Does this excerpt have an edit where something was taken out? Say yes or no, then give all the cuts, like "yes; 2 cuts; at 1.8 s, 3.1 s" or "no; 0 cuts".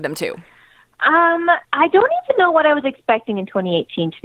yes; 1 cut; at 1.6 s